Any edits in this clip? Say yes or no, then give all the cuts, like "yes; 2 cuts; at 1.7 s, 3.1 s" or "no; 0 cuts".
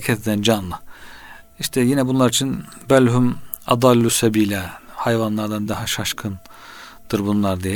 no; 0 cuts